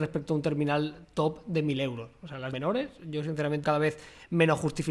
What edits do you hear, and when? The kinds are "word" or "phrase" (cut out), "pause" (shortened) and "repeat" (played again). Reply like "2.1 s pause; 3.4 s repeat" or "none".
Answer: 2.5 s phrase; 3.6 s word